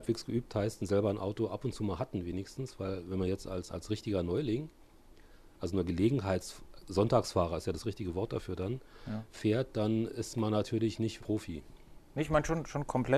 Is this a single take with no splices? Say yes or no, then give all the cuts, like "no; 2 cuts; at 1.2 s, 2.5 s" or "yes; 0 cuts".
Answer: no; 2 cuts; at 3.7 s, 11.2 s